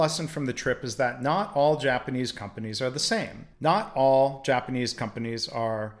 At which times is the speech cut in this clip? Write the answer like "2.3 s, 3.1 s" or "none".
3.5 s

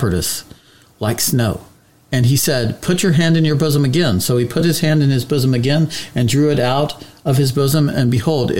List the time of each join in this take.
none

